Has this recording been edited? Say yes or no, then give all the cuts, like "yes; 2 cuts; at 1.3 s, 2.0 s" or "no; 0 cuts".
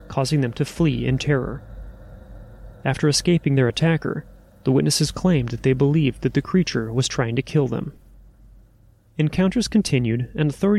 no; 0 cuts